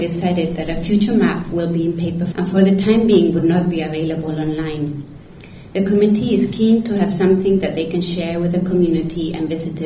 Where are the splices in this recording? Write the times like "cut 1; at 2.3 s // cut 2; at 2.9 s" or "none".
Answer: cut 1; at 2.3 s